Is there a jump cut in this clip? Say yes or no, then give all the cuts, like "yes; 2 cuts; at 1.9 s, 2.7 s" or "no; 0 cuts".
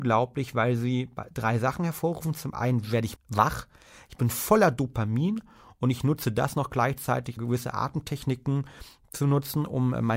yes; 2 cuts; at 3.2 s, 7.4 s